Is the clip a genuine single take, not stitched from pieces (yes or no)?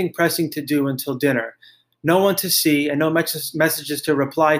yes